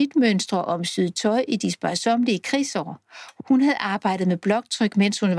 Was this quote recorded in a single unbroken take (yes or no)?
yes